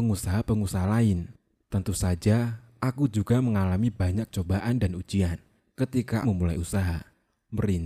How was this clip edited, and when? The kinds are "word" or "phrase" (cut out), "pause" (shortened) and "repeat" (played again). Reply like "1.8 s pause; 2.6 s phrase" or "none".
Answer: 6.2 s phrase